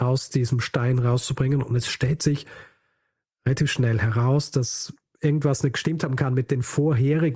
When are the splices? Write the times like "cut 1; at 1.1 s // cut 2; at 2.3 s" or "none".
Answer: none